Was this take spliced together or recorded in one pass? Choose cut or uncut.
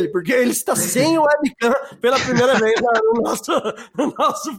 uncut